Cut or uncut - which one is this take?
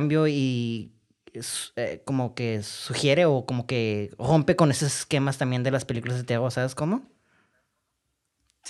uncut